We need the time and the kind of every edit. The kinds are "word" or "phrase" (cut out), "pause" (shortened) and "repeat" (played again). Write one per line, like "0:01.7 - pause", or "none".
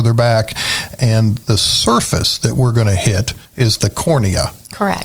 0:03.4 - pause